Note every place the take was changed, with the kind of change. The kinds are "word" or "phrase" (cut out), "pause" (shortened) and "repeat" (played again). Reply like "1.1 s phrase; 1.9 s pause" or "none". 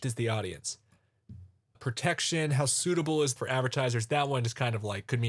1.7 s word; 3.4 s word